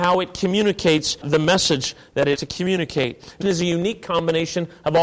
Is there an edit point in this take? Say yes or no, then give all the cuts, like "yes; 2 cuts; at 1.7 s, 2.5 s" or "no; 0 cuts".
yes; 3 cuts; at 1.2 s, 2.4 s, 3.4 s